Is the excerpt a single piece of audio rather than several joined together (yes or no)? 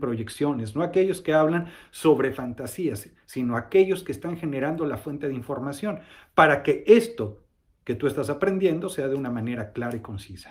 yes